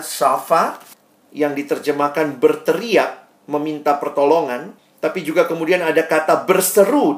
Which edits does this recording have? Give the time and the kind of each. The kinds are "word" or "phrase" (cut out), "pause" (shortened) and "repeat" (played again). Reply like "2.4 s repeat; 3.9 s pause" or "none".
0.9 s pause; 4.8 s pause